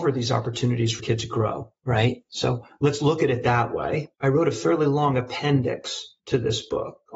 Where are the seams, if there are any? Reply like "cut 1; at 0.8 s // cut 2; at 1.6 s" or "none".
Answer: cut 1; at 1.0 s // cut 2; at 4.1 s // cut 3; at 6.2 s